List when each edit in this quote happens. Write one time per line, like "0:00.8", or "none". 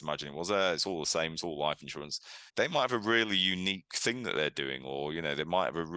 0:02.5